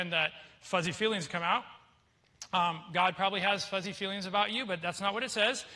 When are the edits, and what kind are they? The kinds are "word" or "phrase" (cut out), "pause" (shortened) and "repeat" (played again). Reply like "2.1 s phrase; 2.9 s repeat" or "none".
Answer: none